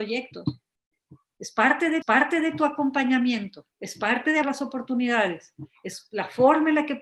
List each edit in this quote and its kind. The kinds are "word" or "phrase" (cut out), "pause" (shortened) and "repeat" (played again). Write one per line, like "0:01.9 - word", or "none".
0:02.0 - repeat
0:03.7 - pause
0:04.4 - word